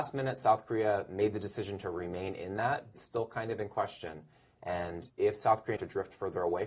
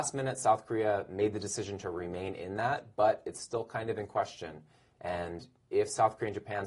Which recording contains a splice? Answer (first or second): first